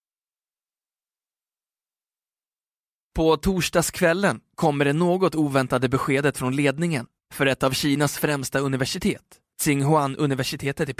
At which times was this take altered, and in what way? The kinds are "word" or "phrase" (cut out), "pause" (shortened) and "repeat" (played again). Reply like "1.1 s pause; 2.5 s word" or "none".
none